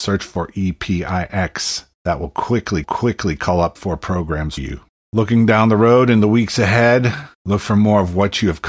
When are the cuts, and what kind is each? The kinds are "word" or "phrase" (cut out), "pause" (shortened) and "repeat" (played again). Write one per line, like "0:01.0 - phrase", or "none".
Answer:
0:01.9 - pause
0:02.8 - repeat
0:03.8 - phrase
0:04.6 - word
0:04.9 - pause
0:07.3 - pause

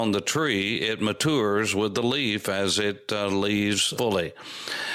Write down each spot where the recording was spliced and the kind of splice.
none

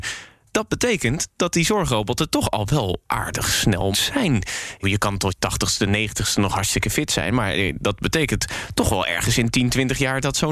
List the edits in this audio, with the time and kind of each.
0:03.9 - word
0:04.8 - word
0:05.3 - word

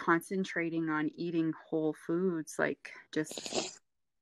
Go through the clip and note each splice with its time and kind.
0:03.1 - pause

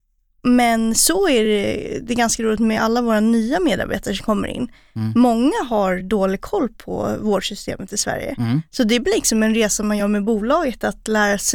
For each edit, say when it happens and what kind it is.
none

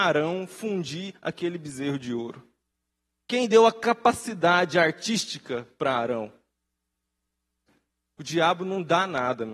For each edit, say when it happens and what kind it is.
0:02.7 - pause

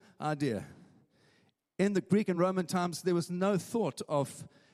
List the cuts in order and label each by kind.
none

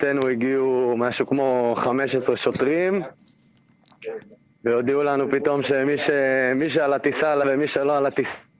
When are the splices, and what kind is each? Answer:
0:07.4 - word

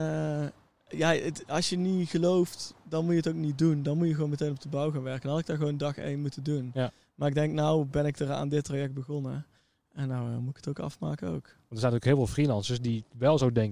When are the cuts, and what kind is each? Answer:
none

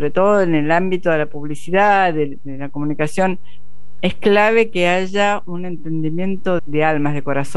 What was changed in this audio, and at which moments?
0:06.6 - word

